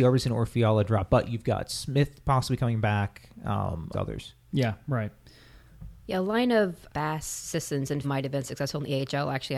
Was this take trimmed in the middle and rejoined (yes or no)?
yes